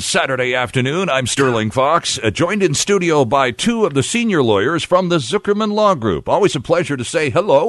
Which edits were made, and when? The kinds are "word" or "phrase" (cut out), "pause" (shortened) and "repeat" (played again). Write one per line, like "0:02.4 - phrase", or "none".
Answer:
none